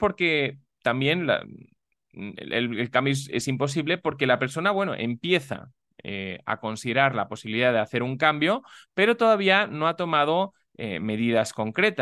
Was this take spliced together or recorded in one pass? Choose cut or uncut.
uncut